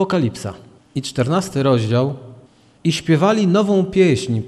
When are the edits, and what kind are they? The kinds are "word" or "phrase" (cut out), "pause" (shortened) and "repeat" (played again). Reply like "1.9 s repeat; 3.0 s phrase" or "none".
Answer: none